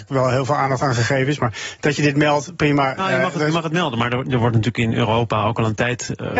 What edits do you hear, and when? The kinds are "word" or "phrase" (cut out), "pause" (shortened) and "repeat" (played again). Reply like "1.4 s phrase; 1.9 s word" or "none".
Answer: none